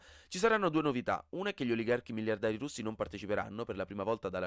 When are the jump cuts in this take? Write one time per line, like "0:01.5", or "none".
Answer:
none